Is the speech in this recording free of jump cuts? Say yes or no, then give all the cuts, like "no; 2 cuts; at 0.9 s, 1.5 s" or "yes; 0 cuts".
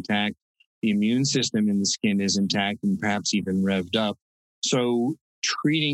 yes; 0 cuts